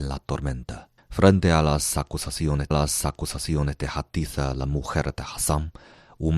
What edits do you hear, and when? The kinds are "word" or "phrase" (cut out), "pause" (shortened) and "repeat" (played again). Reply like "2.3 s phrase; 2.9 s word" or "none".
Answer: 1.0 s pause; 2.7 s repeat